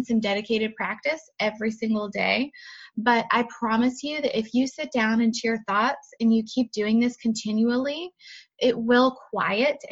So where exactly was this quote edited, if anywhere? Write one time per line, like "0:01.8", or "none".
0:05.3

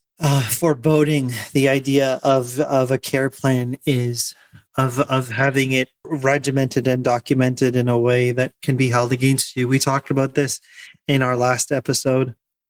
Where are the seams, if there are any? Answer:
none

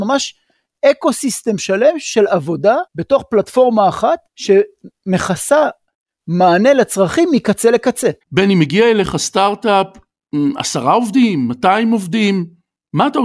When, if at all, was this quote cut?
0:02.9
0:04.3
0:08.2

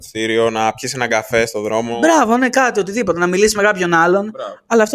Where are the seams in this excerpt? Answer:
none

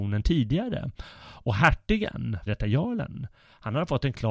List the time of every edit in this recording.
0:02.5

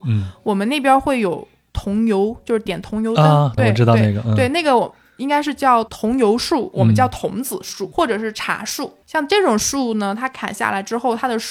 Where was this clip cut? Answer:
0:03.6
0:07.9
0:09.0

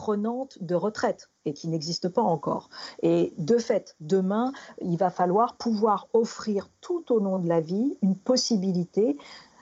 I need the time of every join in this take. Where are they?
0:01.4

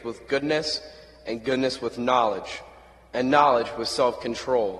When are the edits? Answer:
none

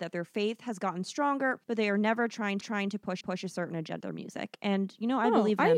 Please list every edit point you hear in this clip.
0:01.6
0:02.6
0:03.2
0:04.0

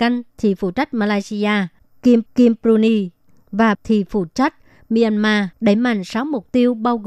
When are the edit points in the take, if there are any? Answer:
0:02.3
0:03.7
0:05.5

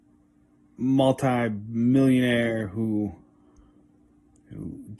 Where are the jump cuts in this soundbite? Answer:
none

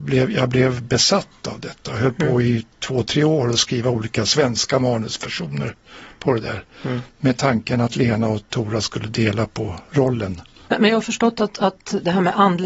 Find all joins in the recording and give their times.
none

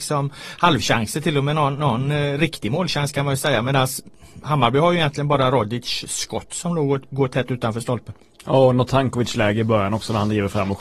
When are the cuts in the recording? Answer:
none

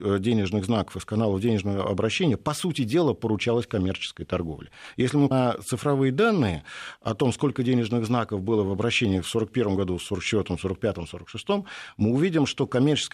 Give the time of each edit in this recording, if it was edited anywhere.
0:05.3

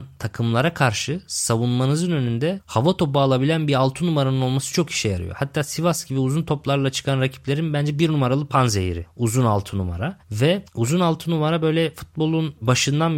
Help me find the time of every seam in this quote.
none

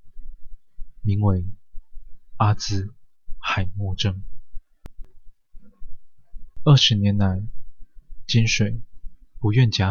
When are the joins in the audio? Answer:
0:06.5

